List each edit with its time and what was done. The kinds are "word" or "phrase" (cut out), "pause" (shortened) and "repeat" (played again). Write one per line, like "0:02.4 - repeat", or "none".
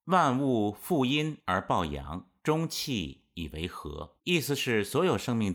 0:02.4 - pause
0:04.2 - pause